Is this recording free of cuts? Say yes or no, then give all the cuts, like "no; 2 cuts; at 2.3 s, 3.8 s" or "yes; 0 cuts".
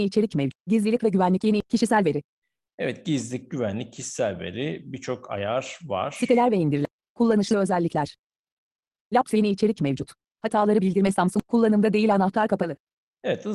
yes; 0 cuts